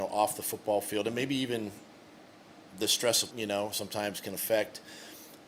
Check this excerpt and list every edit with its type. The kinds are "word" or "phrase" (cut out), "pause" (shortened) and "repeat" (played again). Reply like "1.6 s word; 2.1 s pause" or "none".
3.3 s word